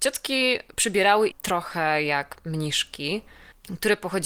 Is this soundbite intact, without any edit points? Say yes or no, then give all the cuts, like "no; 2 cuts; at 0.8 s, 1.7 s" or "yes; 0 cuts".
no; 1 cut; at 1.3 s